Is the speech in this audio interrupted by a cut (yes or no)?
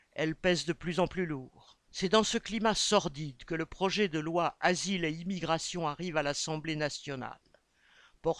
yes